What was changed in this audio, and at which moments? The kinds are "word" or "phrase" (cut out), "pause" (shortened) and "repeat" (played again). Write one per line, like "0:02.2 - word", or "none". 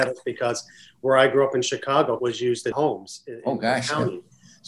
0:02.2 - word
0:02.7 - word